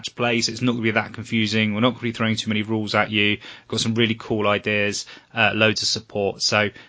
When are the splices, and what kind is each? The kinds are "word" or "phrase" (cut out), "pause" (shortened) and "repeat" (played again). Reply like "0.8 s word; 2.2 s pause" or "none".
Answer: none